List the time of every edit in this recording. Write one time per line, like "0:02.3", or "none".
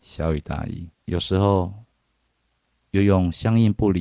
0:00.9

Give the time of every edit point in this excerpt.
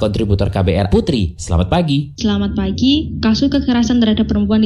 0:00.9

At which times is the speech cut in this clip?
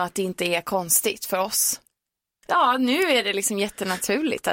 none

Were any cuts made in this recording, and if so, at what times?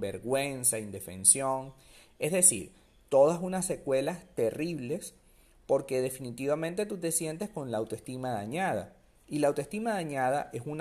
none

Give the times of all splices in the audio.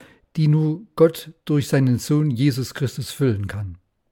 none

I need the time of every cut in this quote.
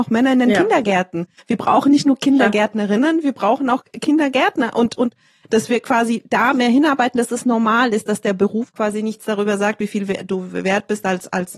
none

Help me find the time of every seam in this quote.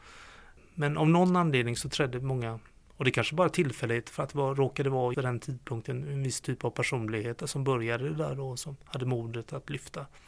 0:05.1

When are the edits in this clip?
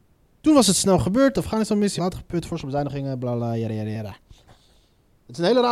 0:02.0

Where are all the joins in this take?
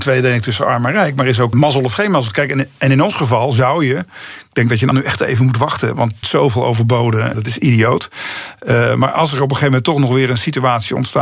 0:01.5
0:04.9
0:06.2
0:07.3

